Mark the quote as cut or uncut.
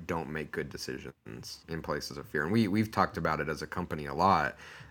cut